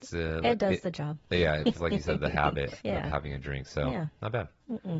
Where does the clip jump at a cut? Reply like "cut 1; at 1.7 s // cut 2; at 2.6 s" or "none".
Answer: cut 1; at 1.7 s // cut 2; at 2.8 s